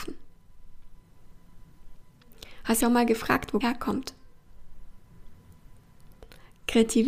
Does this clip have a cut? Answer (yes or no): yes